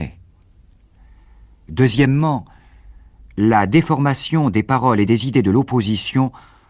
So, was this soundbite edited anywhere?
no; 0 cuts

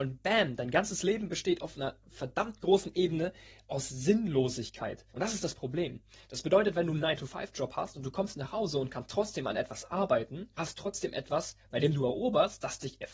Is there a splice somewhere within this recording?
yes; 2 cuts; at 5.1 s, 10.6 s

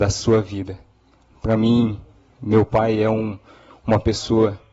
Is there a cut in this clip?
no; 0 cuts

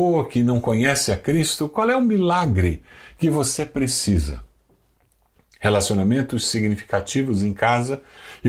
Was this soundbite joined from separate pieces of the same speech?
no; 0 cuts

